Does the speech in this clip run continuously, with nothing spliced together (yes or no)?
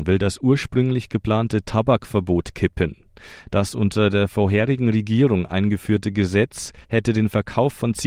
no